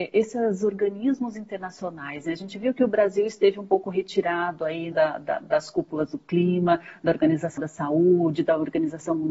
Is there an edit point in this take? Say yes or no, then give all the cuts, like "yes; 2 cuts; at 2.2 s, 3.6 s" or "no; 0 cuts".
yes; 2 cuts; at 4.9 s, 7.6 s